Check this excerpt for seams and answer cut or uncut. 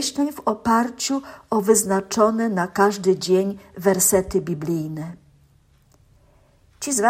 uncut